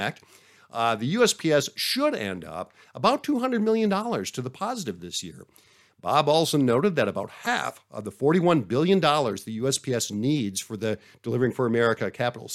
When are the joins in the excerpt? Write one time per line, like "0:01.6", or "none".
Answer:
none